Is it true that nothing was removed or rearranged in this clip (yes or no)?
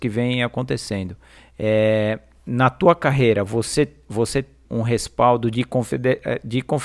no